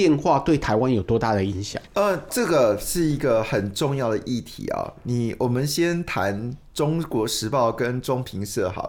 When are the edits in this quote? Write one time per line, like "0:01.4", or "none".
0:01.9
0:02.3

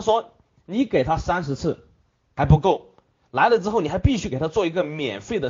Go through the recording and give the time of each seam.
none

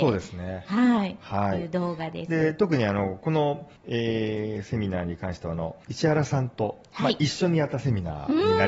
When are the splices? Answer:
0:03.8
0:05.8

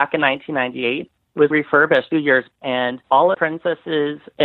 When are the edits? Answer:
0:01.5
0:02.1
0:02.5
0:03.3

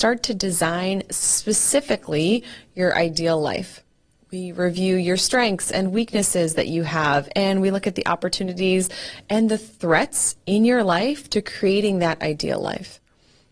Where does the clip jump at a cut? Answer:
none

